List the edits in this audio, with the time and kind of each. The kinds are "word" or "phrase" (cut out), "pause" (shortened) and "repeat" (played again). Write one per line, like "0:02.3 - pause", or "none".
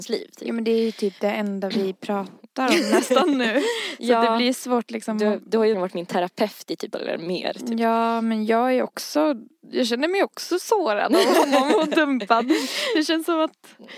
0:05.7 - word
0:06.9 - phrase